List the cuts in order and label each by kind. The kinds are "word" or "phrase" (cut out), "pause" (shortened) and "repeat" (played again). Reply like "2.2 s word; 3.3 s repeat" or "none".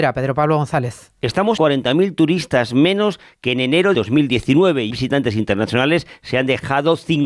1.6 s word; 3.9 s word; 4.9 s word